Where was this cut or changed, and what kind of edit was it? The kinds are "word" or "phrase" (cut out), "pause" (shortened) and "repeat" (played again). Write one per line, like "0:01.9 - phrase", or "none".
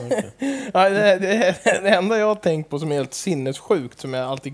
none